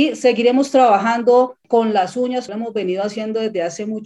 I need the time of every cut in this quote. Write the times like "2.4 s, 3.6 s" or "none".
2.5 s